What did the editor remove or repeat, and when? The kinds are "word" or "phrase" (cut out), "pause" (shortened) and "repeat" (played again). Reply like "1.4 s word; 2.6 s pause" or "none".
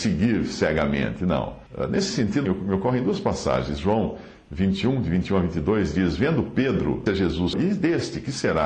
1.7 s pause; 2.5 s word; 7.1 s phrase; 7.5 s word